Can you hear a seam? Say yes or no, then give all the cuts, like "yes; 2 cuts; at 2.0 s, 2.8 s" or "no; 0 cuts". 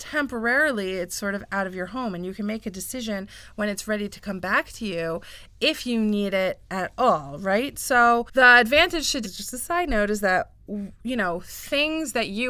yes; 1 cut; at 9.2 s